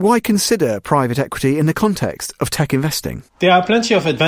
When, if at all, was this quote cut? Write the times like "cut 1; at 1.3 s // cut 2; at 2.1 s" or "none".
cut 1; at 3.3 s